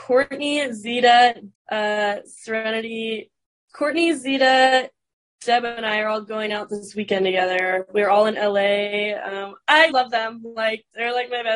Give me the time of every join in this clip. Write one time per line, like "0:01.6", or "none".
0:01.5
0:09.9

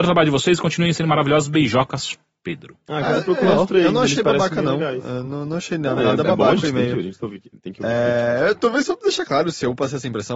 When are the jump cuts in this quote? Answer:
none

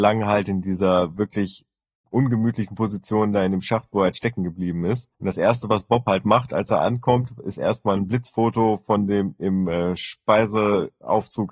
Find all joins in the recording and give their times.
0:05.1

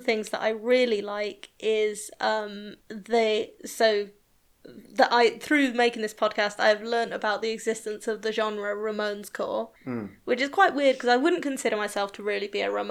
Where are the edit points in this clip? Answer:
0:02.8
0:09.8

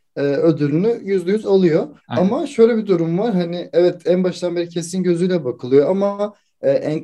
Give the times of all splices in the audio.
0:02.0

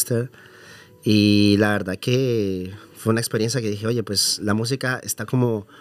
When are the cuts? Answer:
none

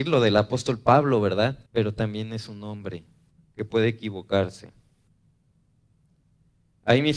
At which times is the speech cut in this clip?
0:01.7

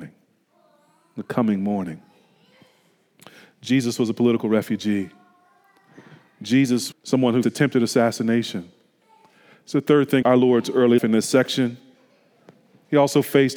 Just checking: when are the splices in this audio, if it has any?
0:06.9
0:07.4
0:10.2
0:11.0

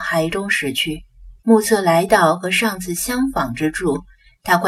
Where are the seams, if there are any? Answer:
0:01.4

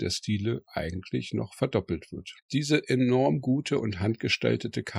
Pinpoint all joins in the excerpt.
0:02.4

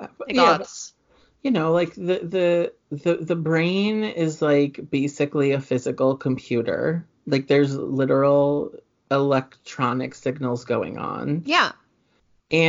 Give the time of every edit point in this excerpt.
none

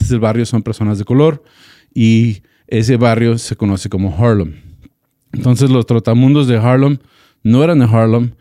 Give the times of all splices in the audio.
none

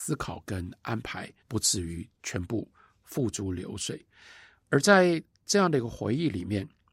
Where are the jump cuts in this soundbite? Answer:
0:01.4

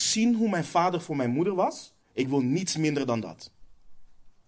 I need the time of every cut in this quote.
0:02.0

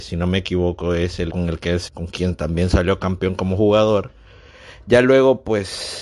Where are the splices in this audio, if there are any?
0:01.3
0:01.9

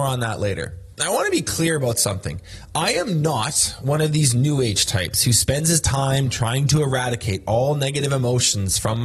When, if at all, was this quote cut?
0:00.9

